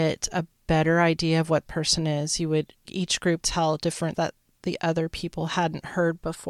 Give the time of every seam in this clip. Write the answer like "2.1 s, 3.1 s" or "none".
1.7 s, 2.9 s, 3.4 s, 4.1 s